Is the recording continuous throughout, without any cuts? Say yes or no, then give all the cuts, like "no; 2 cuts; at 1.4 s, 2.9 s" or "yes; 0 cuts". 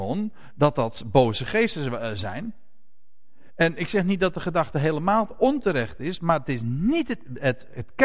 yes; 0 cuts